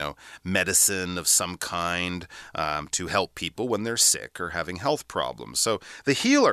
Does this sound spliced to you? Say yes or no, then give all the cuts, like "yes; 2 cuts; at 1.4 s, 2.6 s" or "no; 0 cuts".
no; 0 cuts